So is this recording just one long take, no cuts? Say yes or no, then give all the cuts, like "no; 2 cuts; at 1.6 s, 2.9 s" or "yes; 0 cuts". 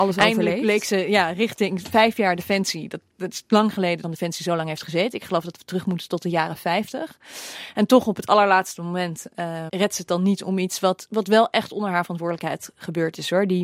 no; 2 cuts; at 4.0 s, 9.7 s